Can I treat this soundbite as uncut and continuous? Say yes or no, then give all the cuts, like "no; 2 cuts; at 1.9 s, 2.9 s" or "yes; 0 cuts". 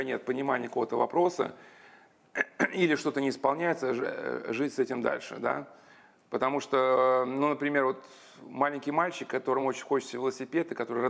yes; 0 cuts